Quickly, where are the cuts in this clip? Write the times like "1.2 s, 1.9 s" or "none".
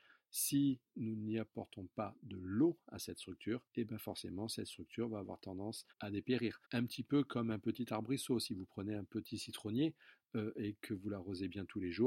3.7 s, 5.9 s, 6.6 s